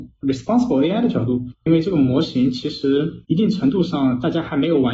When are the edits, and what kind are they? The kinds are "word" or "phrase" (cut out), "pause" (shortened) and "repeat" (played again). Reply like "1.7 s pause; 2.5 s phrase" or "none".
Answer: 3.2 s pause